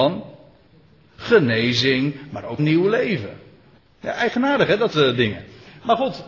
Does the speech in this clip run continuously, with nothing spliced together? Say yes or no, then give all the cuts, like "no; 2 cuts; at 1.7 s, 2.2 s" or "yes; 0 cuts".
no; 3 cuts; at 2.6 s, 3.8 s, 4.9 s